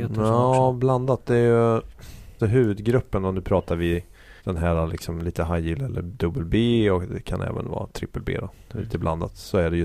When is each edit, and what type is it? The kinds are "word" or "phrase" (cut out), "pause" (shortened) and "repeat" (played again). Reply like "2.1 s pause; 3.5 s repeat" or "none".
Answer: 2.4 s word; 4.4 s pause